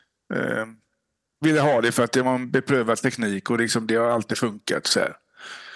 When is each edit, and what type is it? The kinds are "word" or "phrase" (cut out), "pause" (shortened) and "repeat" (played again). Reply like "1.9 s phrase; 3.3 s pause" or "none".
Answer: none